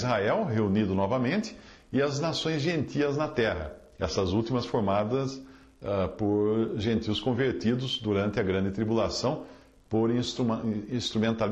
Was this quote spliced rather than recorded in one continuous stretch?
no; 0 cuts

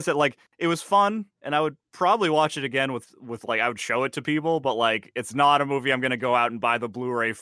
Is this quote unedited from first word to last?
no; 1 cut; at 1.3 s

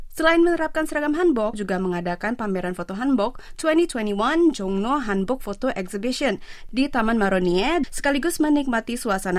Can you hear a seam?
yes; 2 cuts; at 1.5 s, 7.8 s

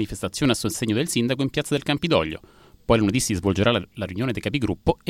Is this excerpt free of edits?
yes; 0 cuts

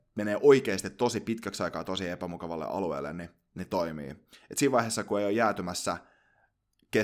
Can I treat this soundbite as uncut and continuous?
yes; 0 cuts

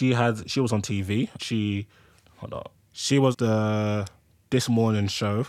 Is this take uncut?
no; 3 cuts; at 1.4 s, 2.8 s, 3.3 s

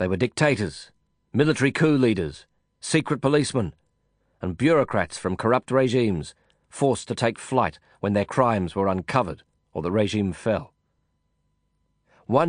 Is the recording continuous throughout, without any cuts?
yes; 0 cuts

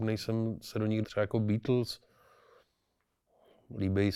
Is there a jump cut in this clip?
yes; 1 cut; at 1.0 s

